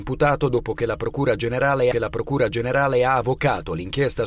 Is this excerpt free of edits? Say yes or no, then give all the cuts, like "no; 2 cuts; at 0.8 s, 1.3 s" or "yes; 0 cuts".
no; 1 cut; at 1.9 s